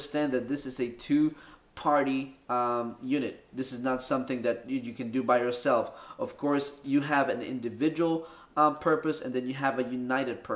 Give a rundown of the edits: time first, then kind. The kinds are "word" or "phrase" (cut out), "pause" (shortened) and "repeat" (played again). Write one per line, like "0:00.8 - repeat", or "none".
none